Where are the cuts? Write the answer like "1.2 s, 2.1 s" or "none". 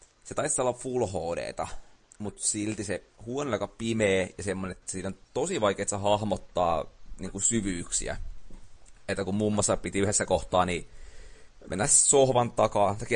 none